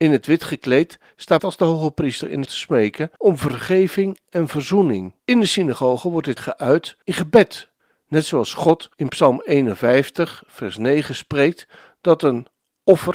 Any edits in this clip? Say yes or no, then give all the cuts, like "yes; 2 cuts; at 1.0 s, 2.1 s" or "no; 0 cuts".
yes; 8 cuts; at 1.4 s, 2.5 s, 3.2 s, 5.2 s, 6.4 s, 7.0 s, 7.8 s, 8.9 s